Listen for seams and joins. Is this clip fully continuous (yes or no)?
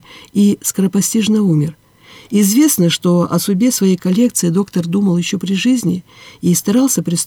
yes